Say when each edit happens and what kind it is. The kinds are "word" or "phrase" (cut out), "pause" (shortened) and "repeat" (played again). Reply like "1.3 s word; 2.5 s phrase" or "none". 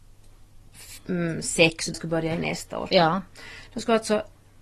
1.9 s phrase